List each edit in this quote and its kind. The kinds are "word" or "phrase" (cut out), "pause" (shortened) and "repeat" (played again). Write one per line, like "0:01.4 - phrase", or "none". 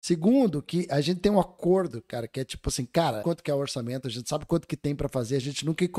0:03.2 - phrase